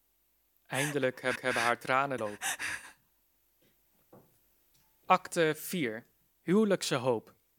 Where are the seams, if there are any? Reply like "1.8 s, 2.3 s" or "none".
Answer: 1.4 s, 2.2 s, 6.3 s